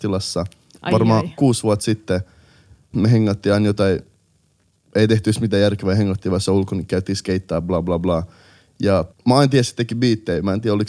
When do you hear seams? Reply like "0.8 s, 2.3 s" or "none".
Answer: none